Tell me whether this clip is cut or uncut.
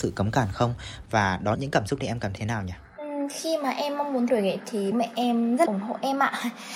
cut